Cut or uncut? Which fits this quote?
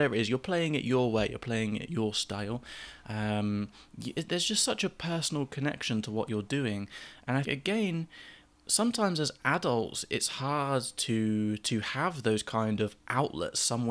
cut